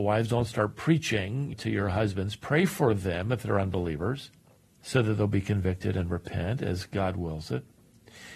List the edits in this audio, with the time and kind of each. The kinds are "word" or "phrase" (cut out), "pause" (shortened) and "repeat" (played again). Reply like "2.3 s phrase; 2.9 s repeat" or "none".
1.5 s word